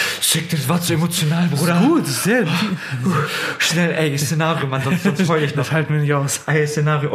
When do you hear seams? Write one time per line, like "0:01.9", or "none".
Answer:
none